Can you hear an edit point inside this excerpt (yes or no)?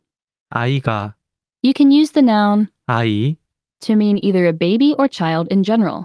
no